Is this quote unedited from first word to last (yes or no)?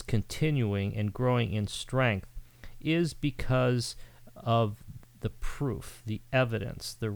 yes